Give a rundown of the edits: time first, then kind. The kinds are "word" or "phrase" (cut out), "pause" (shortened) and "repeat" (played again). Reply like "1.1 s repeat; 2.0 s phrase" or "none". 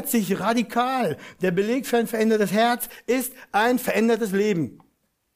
none